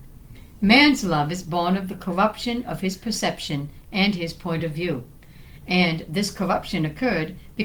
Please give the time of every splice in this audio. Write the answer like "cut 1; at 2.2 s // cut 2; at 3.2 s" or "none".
none

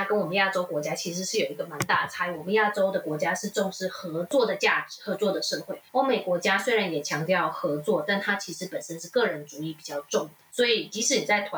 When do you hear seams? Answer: cut 1; at 5.9 s

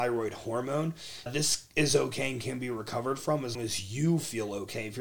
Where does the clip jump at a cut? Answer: cut 1; at 1.3 s // cut 2; at 3.5 s

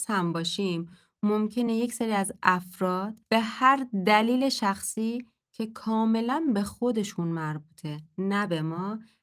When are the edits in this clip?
none

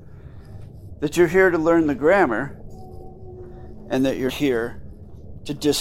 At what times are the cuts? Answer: cut 1; at 4.3 s

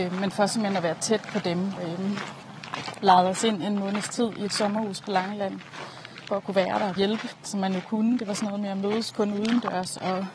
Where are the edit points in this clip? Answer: cut 1; at 1.8 s // cut 2; at 6.3 s // cut 3; at 7.0 s // cut 4; at 7.5 s

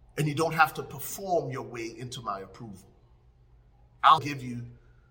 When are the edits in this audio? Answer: cut 1; at 4.2 s

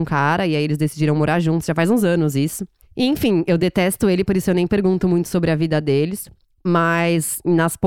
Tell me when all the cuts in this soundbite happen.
none

